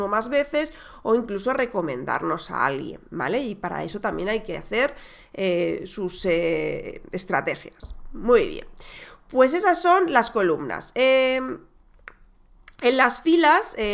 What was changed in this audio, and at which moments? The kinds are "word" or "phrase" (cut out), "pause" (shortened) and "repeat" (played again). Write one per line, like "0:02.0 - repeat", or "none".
none